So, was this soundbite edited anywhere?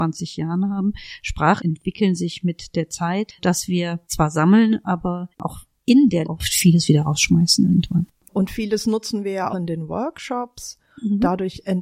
yes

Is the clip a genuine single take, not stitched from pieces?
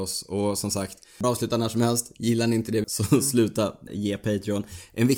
no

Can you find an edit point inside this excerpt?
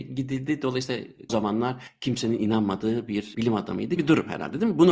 yes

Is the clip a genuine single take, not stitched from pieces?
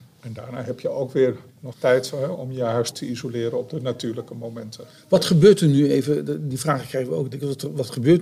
no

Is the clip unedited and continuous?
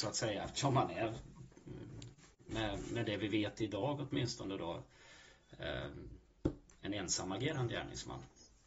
yes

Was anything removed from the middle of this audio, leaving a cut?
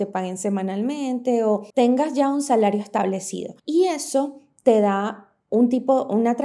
yes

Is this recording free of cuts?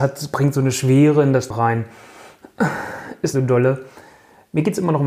no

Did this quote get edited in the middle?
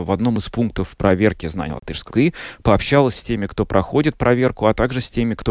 yes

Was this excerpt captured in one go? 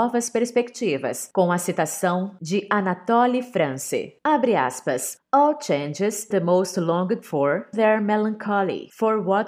no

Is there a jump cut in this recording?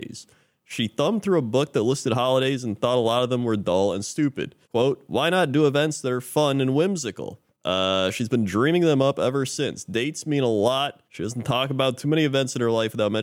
yes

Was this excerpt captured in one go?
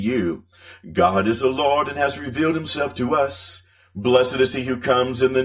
yes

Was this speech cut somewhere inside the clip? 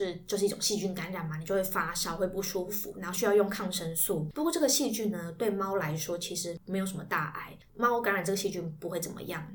no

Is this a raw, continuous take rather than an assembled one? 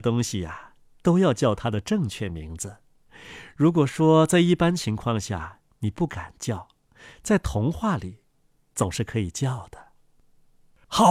yes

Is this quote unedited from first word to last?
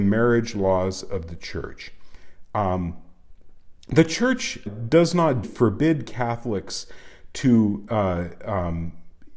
no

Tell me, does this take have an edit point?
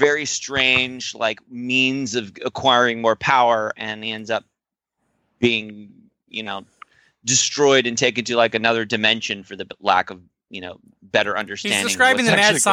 no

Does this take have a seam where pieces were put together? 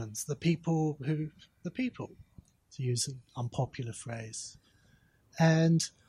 no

